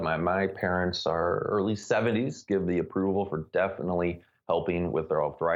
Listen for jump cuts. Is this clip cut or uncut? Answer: uncut